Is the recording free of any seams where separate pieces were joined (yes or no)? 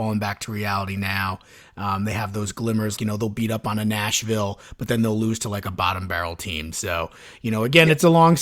no